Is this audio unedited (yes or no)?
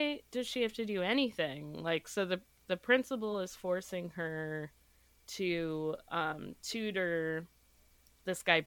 yes